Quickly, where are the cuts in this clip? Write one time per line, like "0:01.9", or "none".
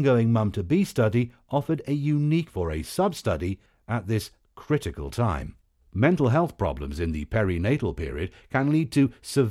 0:02.5
0:05.7